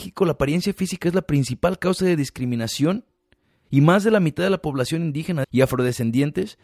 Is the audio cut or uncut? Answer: uncut